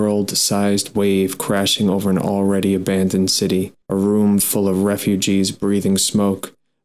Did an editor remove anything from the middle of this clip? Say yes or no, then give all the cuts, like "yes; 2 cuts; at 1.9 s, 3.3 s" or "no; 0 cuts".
yes; 1 cut; at 3.8 s